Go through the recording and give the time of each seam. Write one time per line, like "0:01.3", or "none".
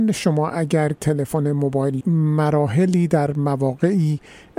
0:01.0
0:02.0